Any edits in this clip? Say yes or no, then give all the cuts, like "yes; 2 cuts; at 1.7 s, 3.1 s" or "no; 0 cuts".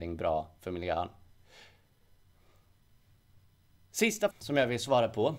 yes; 1 cut; at 4.3 s